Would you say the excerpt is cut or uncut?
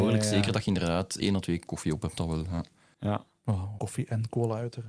cut